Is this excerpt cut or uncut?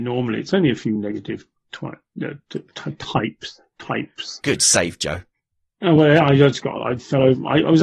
uncut